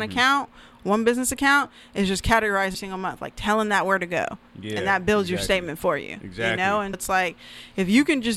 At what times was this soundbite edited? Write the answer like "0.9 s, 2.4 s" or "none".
2.7 s, 6.9 s